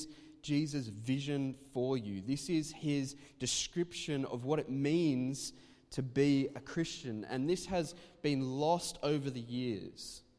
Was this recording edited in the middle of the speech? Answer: no; 0 cuts

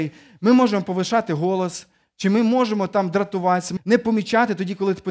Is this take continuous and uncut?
no; 1 cut; at 3.8 s

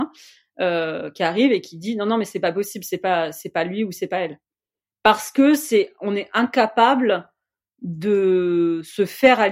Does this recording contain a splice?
no; 0 cuts

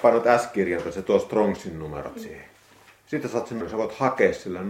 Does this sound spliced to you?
yes; 1 cut; at 3.6 s

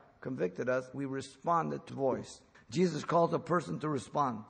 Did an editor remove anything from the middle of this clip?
yes; 3 cuts; at 0.9 s, 1.9 s, 2.5 s

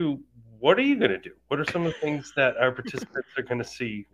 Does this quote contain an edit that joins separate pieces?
no; 0 cuts

